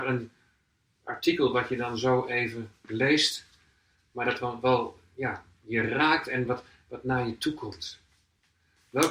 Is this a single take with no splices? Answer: yes; 0 cuts

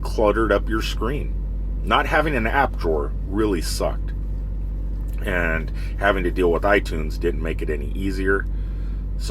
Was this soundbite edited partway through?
no; 0 cuts

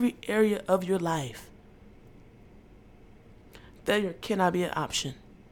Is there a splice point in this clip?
no; 0 cuts

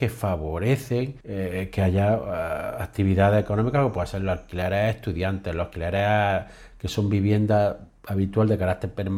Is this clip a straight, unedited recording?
no; 1 cut; at 1.2 s

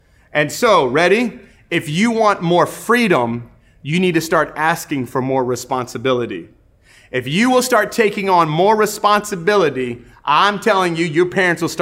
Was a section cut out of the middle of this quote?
no; 0 cuts

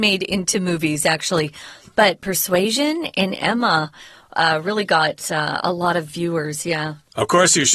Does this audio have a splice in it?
no; 0 cuts

